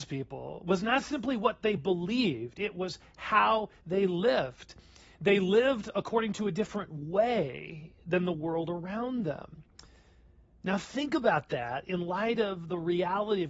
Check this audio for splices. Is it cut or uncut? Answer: uncut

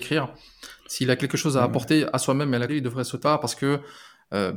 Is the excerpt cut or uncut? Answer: cut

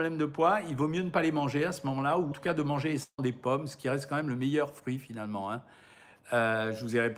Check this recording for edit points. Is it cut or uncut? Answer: cut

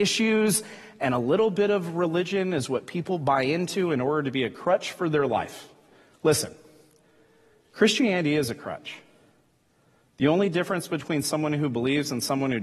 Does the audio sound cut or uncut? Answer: uncut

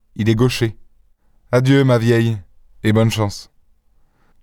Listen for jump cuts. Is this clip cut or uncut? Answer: uncut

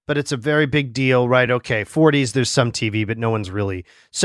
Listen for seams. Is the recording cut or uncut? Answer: uncut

